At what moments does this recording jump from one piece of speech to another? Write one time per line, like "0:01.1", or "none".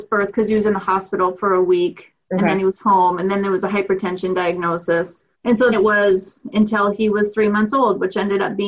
0:05.3
0:05.7